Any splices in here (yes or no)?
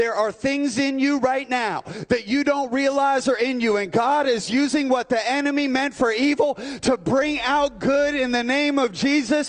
no